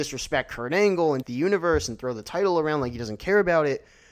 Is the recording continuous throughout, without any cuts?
no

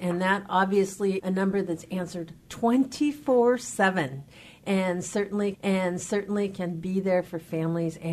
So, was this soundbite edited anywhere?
yes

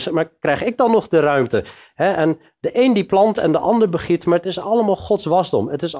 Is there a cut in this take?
no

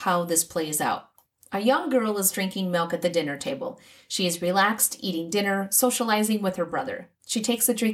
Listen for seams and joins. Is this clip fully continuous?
yes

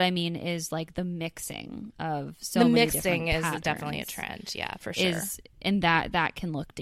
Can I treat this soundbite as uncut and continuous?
yes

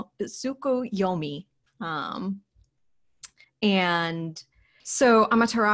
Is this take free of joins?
no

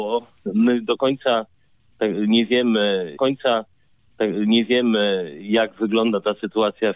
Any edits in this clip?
yes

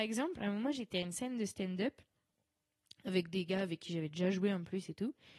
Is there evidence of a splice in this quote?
no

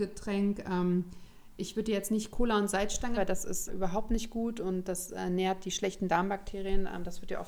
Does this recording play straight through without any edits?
no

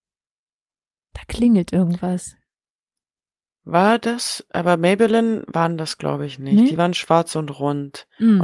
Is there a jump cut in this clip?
no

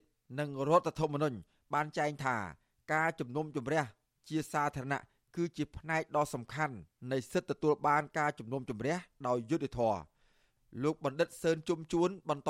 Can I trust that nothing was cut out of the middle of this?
yes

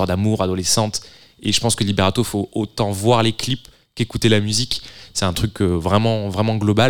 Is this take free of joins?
yes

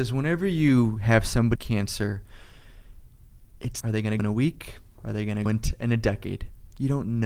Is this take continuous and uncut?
no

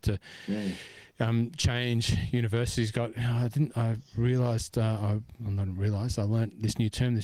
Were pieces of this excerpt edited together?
no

